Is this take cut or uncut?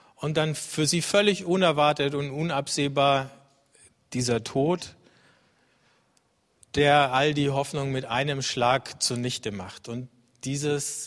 uncut